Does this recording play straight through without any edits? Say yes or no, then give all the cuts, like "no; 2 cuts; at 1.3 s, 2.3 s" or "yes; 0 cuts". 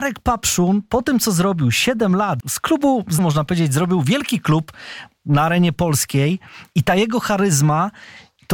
no; 2 cuts; at 2.4 s, 3.2 s